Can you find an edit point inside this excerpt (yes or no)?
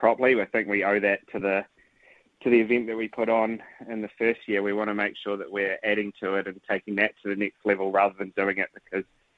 yes